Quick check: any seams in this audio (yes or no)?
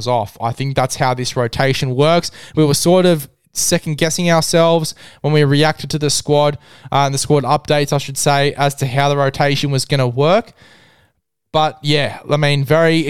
no